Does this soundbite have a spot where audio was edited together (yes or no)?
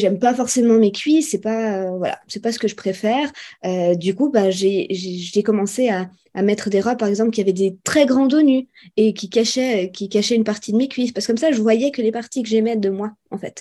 no